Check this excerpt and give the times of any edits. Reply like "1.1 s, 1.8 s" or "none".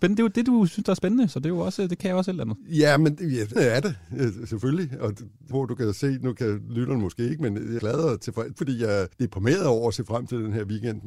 3.6 s, 5.5 s, 7.8 s, 8.6 s, 9.1 s